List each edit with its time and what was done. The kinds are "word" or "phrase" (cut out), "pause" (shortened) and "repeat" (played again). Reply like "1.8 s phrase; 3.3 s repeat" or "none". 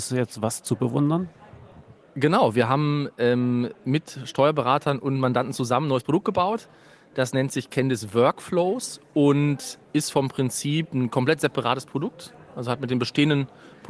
none

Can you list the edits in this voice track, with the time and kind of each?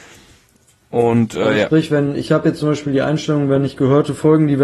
none

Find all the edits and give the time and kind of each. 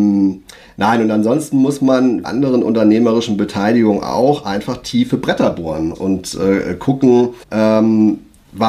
2.2 s phrase; 5.9 s word; 7.4 s pause

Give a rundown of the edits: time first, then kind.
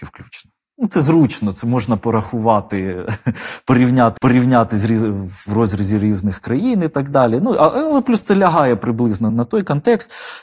4.2 s repeat; 9.3 s word

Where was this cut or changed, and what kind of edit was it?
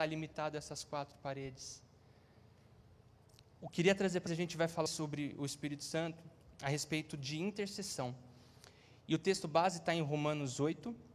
3.5 s pause; 4.3 s word; 4.9 s word

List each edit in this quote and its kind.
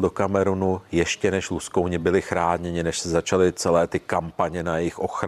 none

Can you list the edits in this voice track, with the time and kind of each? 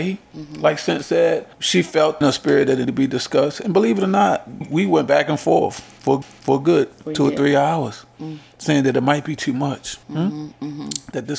1.5 s pause; 2.2 s phrase; 2.8 s word; 4.6 s word; 6.2 s repeat; 10.0 s pause

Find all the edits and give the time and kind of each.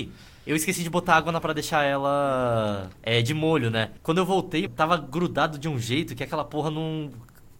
1.4 s word; 2.9 s pause; 4.0 s pause; 4.7 s word

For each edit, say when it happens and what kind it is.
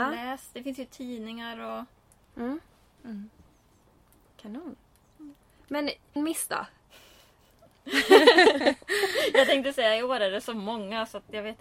6.2 s word

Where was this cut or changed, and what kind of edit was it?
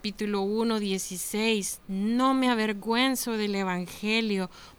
none

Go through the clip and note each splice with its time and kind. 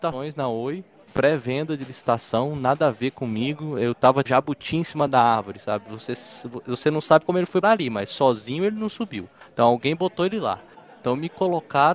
4.3 s word; 7.6 s word

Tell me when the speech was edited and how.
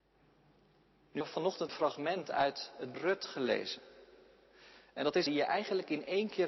1.2 s word; 1.7 s word; 2.9 s word; 5.3 s phrase

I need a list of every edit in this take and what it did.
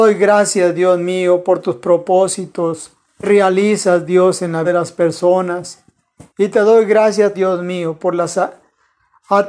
3.2 s word; 4.6 s word; 6.3 s pause; 7.3 s word

